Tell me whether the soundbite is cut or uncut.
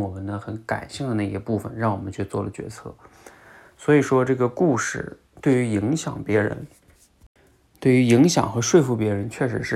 uncut